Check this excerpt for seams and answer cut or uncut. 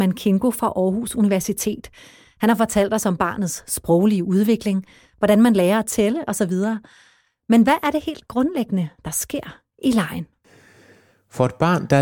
uncut